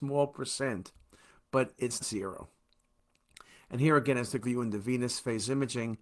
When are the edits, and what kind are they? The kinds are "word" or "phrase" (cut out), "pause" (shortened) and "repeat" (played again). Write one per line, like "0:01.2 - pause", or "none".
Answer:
0:02.0 - word
0:04.4 - word